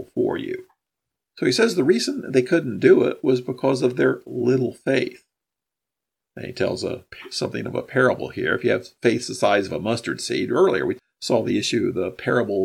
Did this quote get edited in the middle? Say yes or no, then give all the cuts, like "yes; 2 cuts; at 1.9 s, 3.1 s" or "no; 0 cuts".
no; 0 cuts